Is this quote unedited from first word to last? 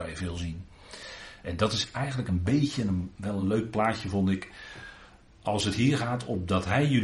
yes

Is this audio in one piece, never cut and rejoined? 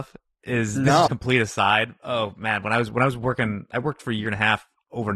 no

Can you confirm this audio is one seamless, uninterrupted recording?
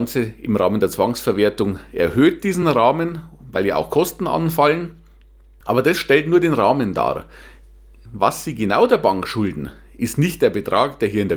yes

